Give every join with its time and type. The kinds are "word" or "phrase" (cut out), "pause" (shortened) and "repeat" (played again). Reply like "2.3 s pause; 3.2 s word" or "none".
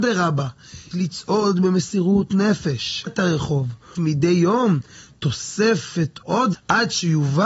0.9 s word; 3.1 s word; 3.9 s word; 6.2 s word; 6.5 s word